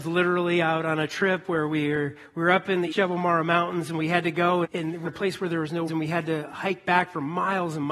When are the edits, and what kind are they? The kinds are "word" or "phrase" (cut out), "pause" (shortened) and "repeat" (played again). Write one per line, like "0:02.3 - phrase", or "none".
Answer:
0:02.9 - word
0:04.6 - word
0:05.0 - word
0:05.9 - word